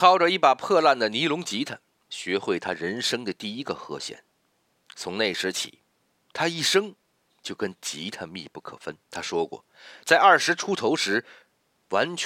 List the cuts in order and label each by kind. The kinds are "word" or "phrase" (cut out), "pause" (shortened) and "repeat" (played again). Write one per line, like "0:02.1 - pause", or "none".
0:09.0 - pause